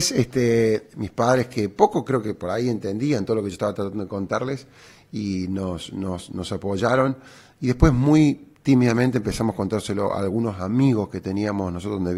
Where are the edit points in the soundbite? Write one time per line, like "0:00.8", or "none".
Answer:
none